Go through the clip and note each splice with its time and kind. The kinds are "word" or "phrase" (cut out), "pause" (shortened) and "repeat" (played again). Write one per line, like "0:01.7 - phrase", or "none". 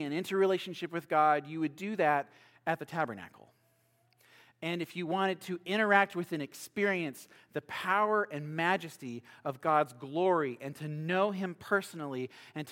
none